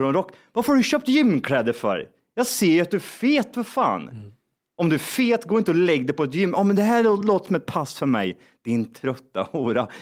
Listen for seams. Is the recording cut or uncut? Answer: uncut